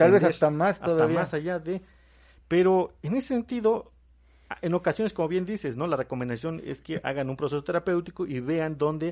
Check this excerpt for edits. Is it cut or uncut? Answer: uncut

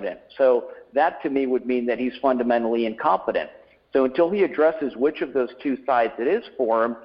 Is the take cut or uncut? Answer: uncut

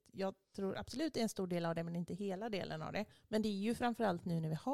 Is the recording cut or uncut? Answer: uncut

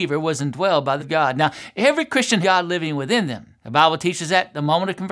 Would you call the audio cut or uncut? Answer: cut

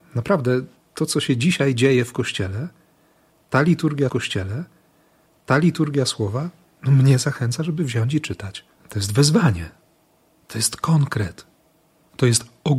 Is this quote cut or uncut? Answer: cut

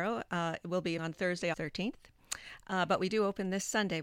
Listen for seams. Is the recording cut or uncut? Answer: cut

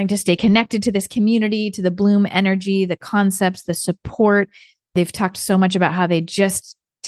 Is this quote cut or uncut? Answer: uncut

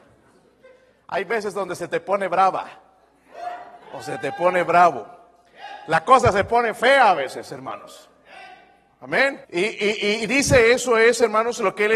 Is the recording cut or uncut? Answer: cut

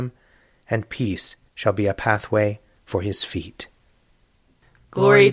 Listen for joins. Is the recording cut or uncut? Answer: uncut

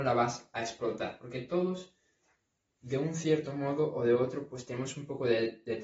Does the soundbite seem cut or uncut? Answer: uncut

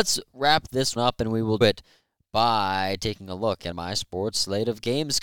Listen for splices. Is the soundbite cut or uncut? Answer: cut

